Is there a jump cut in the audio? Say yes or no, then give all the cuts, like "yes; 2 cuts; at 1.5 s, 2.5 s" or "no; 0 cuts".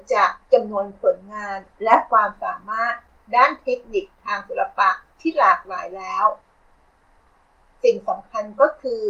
no; 0 cuts